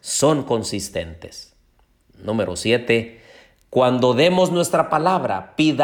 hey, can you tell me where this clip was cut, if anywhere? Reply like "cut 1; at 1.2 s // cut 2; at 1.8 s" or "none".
none